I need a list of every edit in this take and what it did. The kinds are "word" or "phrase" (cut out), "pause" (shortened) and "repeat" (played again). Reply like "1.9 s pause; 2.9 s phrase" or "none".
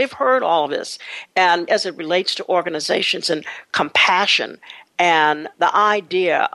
1.7 s word